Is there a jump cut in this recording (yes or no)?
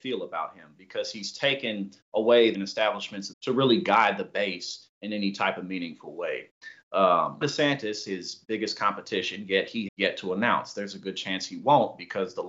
yes